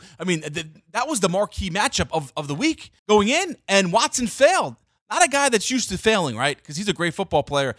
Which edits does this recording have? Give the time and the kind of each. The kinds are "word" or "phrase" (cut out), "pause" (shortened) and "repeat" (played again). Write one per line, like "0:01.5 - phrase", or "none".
0:03.0 - pause